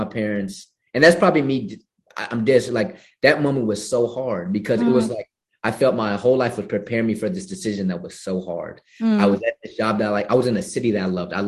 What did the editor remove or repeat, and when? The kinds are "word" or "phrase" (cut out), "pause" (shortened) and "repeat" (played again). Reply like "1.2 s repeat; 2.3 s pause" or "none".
none